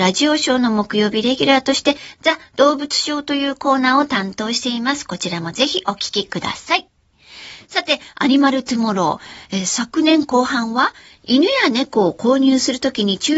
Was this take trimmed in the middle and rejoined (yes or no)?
no